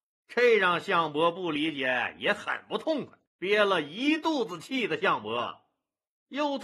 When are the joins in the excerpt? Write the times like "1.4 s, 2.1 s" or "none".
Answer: 3.3 s